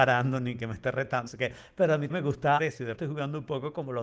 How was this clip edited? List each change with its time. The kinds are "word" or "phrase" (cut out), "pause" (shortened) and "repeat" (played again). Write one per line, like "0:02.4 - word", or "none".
0:01.3 - word
0:02.1 - word
0:02.6 - word
0:02.9 - word